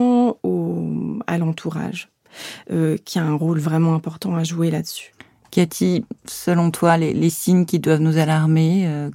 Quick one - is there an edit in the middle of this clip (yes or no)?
no